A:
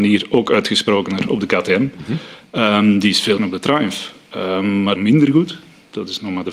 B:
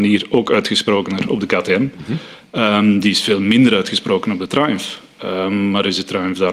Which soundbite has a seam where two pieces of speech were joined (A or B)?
A